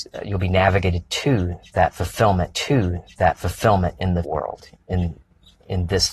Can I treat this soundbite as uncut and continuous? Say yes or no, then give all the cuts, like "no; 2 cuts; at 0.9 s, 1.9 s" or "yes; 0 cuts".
no; 2 cuts; at 2.5 s, 4.2 s